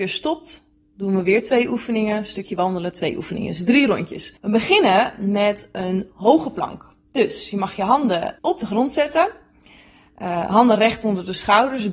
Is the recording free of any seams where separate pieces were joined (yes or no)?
no